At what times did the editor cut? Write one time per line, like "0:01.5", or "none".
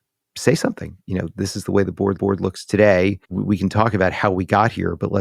0:01.0
0:02.2
0:03.2